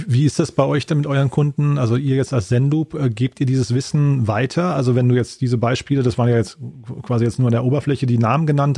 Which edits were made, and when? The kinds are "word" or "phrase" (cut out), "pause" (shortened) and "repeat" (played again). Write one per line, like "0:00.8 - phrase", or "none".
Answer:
none